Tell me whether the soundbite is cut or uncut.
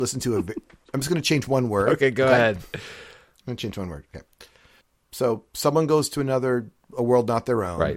cut